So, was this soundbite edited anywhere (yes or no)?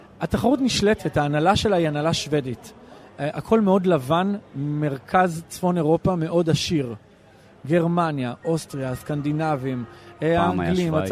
no